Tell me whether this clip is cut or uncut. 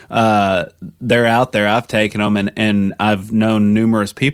uncut